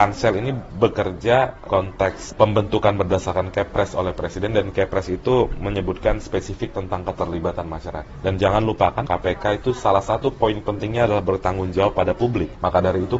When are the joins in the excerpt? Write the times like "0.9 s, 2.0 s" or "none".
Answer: 1.7 s, 9.0 s